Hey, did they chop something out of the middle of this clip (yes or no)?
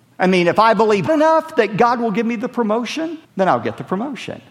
yes